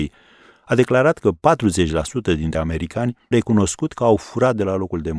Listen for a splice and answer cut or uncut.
cut